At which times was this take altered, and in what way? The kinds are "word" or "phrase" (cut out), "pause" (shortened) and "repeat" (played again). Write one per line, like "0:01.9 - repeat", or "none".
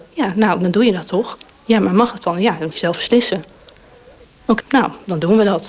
0:02.7 - word
0:04.6 - word